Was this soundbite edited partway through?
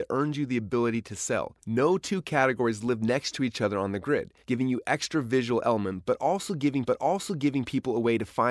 yes; 3 cuts; at 1.6 s, 4.4 s, 6.8 s

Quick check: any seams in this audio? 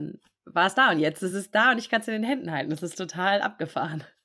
no; 0 cuts

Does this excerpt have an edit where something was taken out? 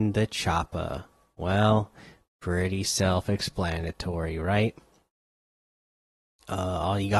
no; 0 cuts

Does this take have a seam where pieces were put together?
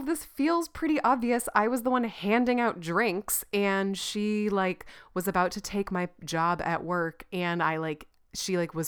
no; 0 cuts

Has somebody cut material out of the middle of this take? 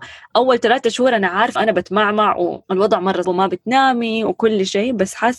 yes; 3 cuts; at 1.6 s, 2.6 s, 3.2 s

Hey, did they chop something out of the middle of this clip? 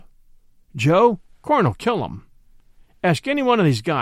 no; 0 cuts

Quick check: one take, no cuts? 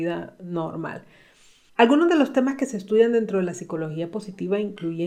yes; 0 cuts

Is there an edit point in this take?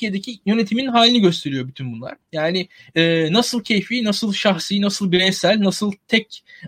no; 0 cuts

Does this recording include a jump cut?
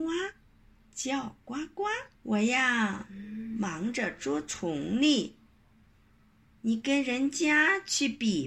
yes; 1 cut; at 2.2 s

